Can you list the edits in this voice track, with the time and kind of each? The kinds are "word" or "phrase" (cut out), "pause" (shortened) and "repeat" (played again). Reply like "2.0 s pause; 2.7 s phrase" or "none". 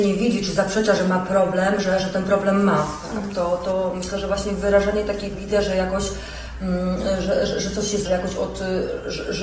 5.3 s phrase; 8.0 s phrase